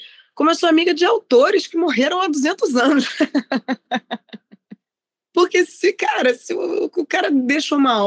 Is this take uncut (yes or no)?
yes